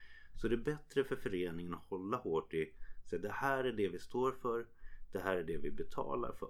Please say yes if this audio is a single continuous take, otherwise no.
yes